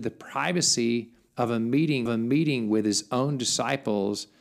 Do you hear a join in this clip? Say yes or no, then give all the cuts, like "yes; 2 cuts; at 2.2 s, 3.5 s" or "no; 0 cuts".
yes; 1 cut; at 2.1 s